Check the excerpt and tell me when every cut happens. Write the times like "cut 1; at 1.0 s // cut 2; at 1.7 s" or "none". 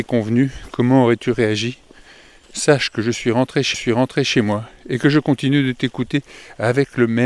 cut 1; at 3.7 s